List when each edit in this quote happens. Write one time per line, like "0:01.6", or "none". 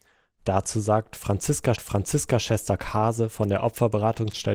0:01.8

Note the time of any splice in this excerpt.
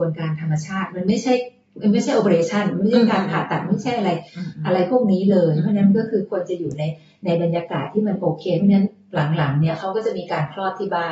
none

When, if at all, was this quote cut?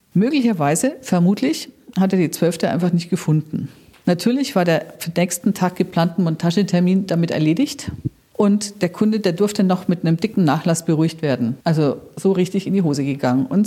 0:03.9
0:11.6

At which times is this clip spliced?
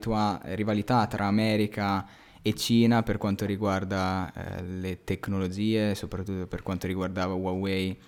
none

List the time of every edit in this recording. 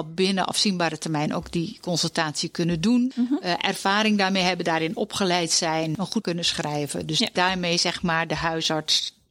0:06.2

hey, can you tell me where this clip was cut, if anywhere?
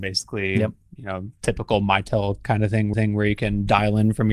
0:01.4
0:02.9

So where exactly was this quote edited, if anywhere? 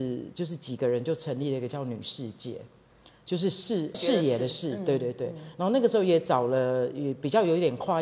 0:03.9

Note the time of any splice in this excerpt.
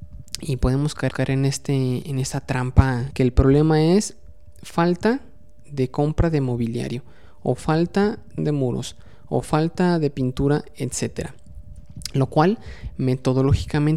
0:01.1
0:03.1
0:08.4

